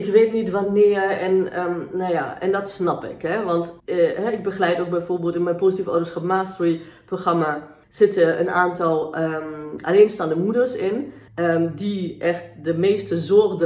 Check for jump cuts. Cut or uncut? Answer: cut